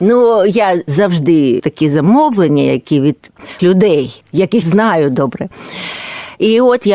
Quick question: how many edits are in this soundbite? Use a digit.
3